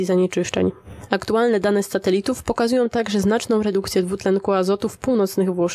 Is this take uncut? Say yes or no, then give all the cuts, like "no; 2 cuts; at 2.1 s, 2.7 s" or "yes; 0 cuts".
yes; 0 cuts